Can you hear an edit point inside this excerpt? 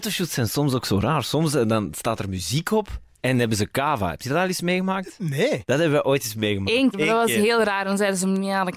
yes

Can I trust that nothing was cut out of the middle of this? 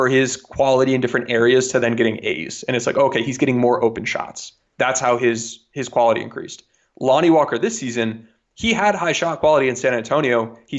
yes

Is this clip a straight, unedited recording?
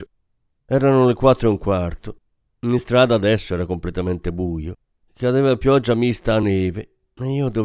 yes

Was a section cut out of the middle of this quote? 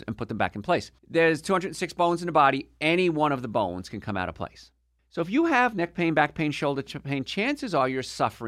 yes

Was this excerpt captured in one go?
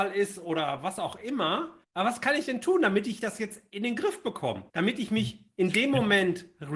no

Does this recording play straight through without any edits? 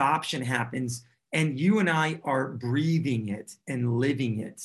yes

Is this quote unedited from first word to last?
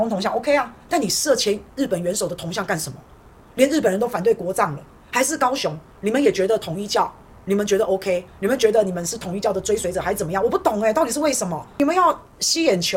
yes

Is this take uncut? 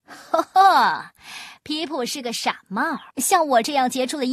no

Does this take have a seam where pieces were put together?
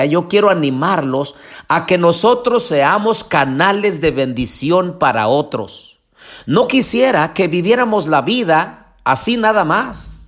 no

